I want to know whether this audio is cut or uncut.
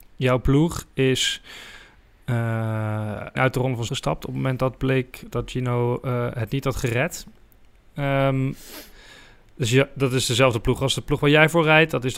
cut